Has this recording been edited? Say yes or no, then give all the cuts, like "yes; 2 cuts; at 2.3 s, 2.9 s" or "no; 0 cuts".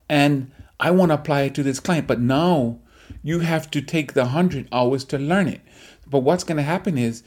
no; 0 cuts